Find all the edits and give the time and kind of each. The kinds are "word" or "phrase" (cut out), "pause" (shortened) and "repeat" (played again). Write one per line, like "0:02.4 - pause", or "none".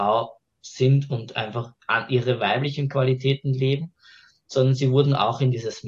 0:01.8 - pause

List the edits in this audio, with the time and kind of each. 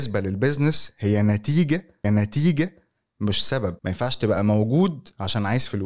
0:02.0 - repeat
0:03.8 - pause

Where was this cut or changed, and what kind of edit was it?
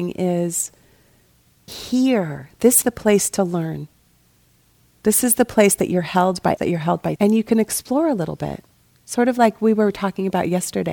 0:01.7 - word
0:02.8 - word
0:06.6 - word
0:07.2 - word

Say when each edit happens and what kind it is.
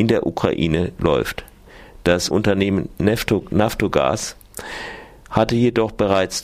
0:02.3 - word

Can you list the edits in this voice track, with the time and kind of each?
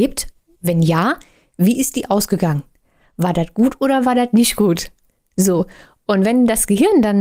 none

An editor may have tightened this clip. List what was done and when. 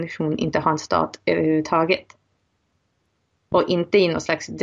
none

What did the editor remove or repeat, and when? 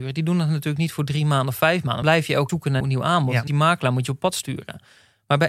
0:02.0 - word
0:02.5 - word
0:02.8 - word
0:03.5 - word

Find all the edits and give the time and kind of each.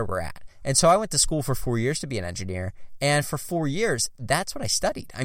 none

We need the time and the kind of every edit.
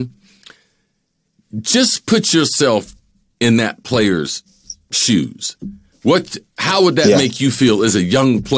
none

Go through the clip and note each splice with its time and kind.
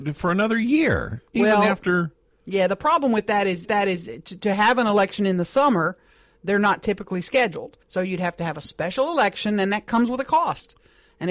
0:03.6 - repeat
0:07.8 - pause

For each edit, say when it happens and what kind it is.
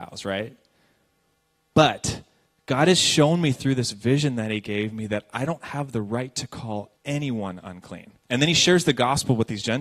0:07.0 - pause
0:08.2 - pause

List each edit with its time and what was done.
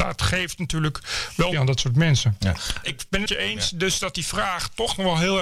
0:01.5 - word
0:02.8 - word
0:03.3 - word

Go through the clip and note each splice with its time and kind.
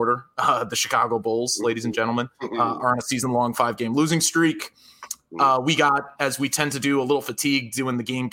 0:02.3 - pause

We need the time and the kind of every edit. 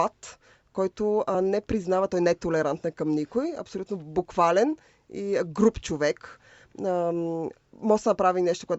none

